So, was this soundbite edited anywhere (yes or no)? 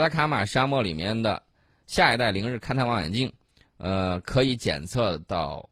no